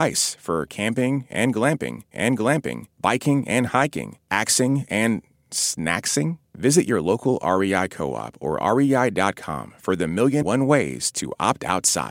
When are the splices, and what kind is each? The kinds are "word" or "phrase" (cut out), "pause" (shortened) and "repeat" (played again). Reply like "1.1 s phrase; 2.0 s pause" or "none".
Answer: 2.1 s repeat; 10.4 s word